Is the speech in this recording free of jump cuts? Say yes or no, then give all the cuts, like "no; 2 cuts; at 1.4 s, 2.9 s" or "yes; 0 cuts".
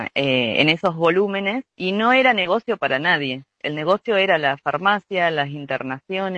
no; 1 cut; at 1.7 s